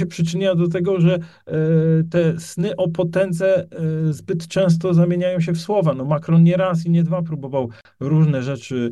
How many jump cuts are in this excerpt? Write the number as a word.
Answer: zero